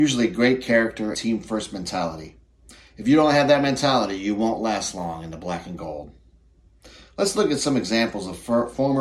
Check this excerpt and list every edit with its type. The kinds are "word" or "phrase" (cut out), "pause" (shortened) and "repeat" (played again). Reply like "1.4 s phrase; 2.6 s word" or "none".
1.1 s word